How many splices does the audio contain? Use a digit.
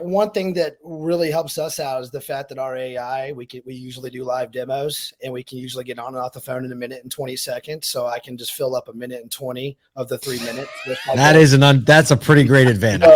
0